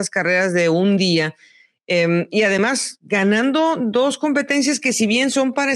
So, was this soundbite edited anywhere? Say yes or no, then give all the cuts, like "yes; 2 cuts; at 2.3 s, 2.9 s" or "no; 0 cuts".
no; 0 cuts